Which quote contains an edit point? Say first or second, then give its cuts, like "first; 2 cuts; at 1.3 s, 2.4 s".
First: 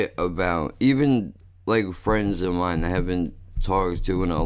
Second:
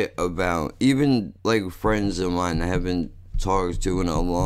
second; 1 cut; at 1.4 s